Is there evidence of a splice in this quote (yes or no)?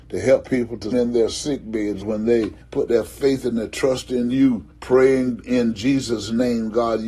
yes